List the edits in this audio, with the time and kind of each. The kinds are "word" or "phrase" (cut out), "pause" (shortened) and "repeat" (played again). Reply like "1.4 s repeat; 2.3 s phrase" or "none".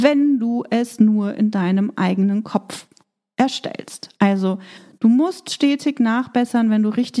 none